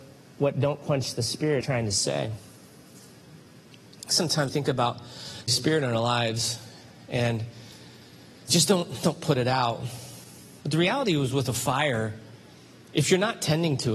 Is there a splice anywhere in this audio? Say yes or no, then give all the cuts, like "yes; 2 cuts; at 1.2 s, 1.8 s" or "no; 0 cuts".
yes; 6 cuts; at 1.6 s, 4.1 s, 4.5 s, 5.5 s, 8.5 s, 9.0 s